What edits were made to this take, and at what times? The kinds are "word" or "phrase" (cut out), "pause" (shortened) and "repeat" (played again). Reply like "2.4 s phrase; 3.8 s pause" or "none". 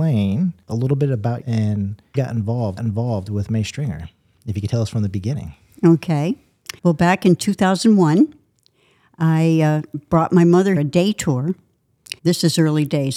1.4 s word; 2.1 s word; 2.8 s repeat; 6.8 s pause; 10.8 s phrase; 12.2 s pause